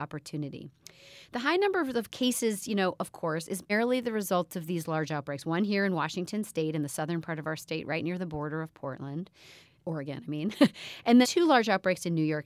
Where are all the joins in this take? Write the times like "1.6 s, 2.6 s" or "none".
3.7 s, 9.8 s, 11.2 s